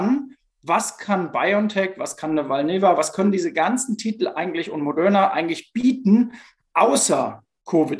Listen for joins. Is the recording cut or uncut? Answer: uncut